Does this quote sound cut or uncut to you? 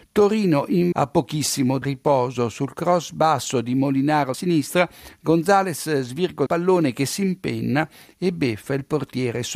cut